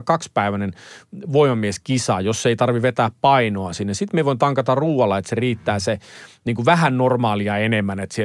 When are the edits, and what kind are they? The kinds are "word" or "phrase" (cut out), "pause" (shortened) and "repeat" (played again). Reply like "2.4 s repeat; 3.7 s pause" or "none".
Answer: none

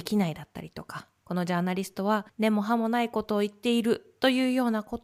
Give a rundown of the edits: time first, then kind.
2.3 s pause

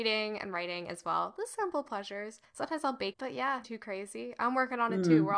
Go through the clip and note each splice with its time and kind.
3.1 s word; 3.6 s word

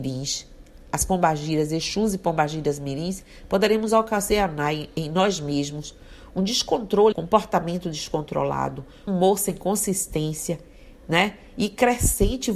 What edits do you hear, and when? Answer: 7.1 s word; 9.1 s word

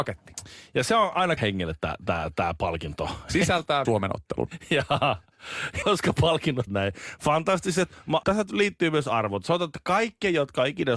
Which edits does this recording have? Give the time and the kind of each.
1.4 s word; 3.8 s word; 5.8 s word; 6.7 s word; 8.2 s word

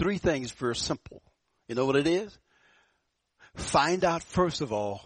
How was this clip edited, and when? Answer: none

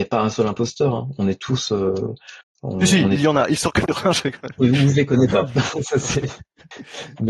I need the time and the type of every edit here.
4.6 s word

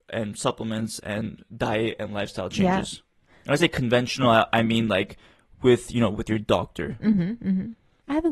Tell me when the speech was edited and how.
none

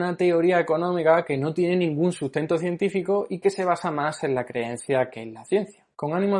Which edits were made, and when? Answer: none

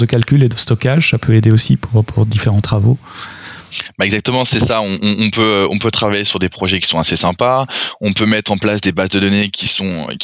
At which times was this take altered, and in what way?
none

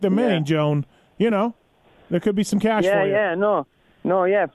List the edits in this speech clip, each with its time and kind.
none

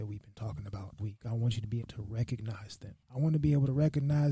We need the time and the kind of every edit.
1.0 s word; 1.8 s word; 3.0 s pause

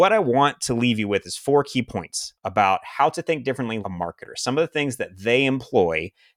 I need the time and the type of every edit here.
2.4 s pause; 3.8 s word

